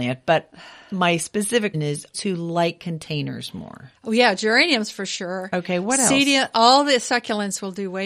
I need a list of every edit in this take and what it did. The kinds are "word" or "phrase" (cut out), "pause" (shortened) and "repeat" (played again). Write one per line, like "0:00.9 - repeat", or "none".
0:01.7 - word
0:02.1 - phrase
0:04.0 - pause